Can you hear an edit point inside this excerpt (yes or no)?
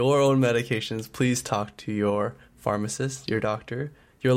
no